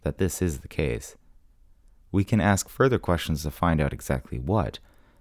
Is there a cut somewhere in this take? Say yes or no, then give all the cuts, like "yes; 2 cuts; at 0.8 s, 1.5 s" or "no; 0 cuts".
no; 0 cuts